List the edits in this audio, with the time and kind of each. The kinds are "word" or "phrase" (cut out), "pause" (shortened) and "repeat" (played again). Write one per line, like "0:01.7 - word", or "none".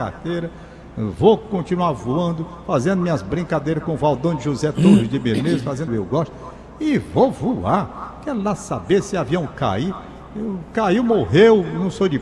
0:05.9 - phrase